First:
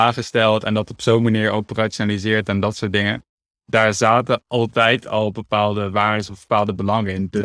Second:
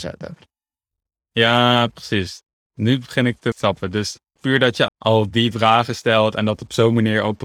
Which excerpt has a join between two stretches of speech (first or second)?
second